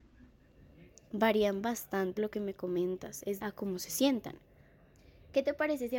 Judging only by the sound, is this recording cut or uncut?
cut